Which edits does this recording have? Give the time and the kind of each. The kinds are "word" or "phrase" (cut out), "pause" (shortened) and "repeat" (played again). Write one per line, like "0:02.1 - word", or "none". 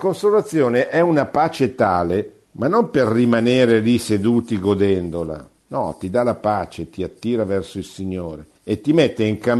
0:02.4 - pause
0:05.6 - pause
0:08.5 - pause